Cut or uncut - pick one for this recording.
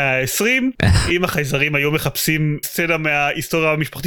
cut